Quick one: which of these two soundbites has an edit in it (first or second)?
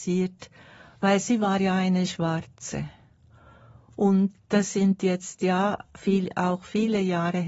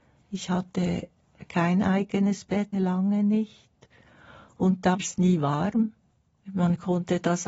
second